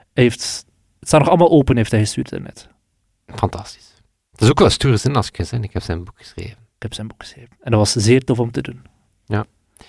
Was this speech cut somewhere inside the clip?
no; 0 cuts

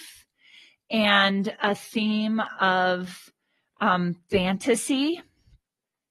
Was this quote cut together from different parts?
no; 0 cuts

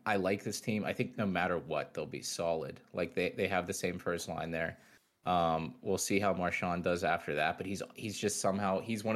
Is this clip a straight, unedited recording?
yes; 0 cuts

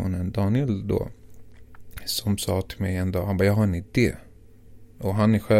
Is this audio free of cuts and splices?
yes; 0 cuts

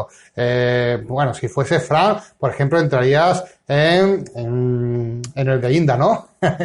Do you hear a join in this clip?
no; 0 cuts

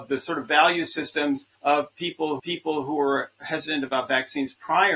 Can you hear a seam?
yes; 2 cuts; at 1.5 s, 2.4 s

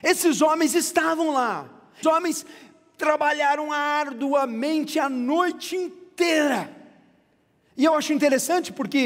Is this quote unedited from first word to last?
no; 1 cut; at 2.0 s

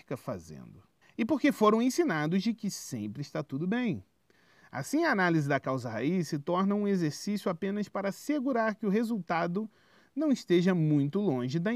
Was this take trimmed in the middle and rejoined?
yes; 1 cut; at 1.0 s

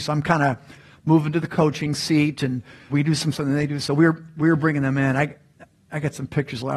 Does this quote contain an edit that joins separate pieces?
yes; 2 cuts; at 2.9 s, 3.3 s

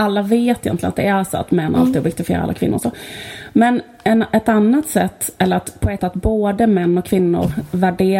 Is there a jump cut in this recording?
yes; 1 cut; at 6.0 s

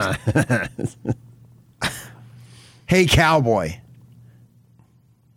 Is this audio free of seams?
yes; 0 cuts

